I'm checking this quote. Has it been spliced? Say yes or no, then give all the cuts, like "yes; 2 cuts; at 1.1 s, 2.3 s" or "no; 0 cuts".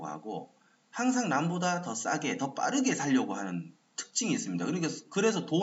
no; 0 cuts